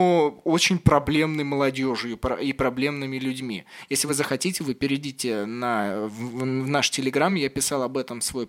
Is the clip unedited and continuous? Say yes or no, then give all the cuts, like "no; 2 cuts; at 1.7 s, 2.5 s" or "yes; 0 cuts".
yes; 0 cuts